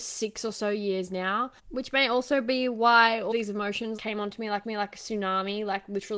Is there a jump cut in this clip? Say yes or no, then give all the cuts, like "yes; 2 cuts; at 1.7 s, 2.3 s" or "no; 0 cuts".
yes; 4 cuts; at 1.6 s, 3.3 s, 4.0 s, 4.6 s